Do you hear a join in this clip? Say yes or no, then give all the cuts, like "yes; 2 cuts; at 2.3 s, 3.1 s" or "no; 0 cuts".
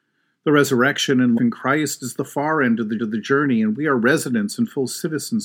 yes; 2 cuts; at 1.4 s, 3.0 s